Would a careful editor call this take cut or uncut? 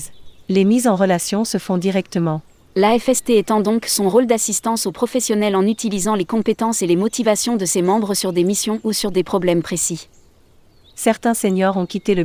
uncut